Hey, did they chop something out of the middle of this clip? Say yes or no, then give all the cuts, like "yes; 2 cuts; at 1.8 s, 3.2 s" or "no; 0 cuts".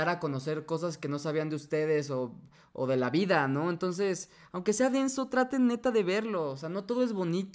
no; 0 cuts